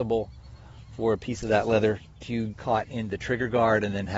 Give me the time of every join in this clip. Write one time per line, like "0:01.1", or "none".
0:02.5